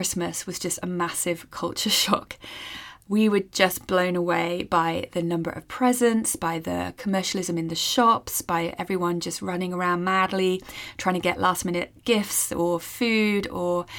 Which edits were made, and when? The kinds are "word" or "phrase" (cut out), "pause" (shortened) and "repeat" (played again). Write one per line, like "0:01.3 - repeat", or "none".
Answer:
none

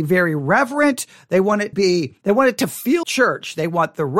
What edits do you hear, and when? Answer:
0:01.7 - word
0:02.2 - pause
0:03.0 - word

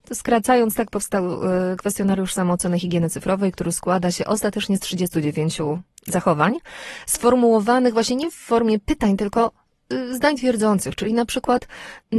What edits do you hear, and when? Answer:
none

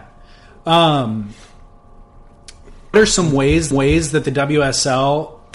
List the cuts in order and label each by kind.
0:02.9 - word
0:03.7 - repeat

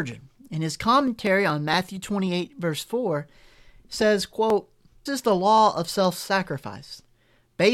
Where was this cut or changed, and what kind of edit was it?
0:05.1 - word

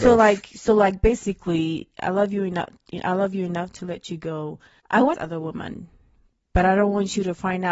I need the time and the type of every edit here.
0:04.8 - pause
0:05.1 - phrase

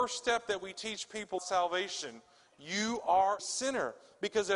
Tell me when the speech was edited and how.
0:01.4 - word
0:03.4 - word

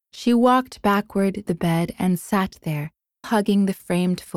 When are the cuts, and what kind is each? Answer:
0:01.5 - word
0:03.2 - word

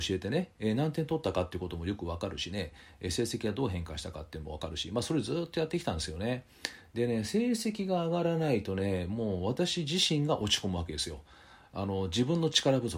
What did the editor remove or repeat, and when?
none

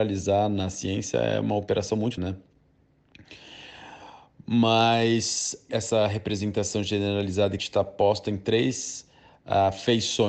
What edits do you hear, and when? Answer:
0:02.2 - word
0:05.7 - phrase
0:07.6 - phrase

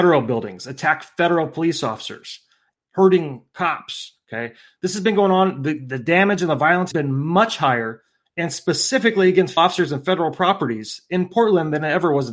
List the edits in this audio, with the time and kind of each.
0:02.7 - word
0:06.9 - word
0:09.6 - word

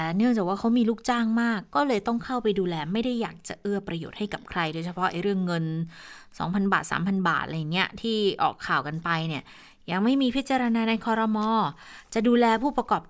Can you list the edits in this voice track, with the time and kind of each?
none

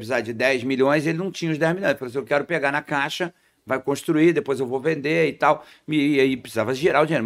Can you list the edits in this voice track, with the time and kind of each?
none

